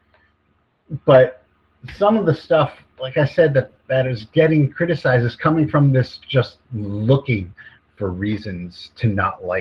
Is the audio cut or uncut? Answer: uncut